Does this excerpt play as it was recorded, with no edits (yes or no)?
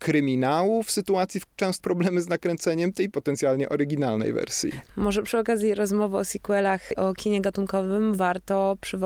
no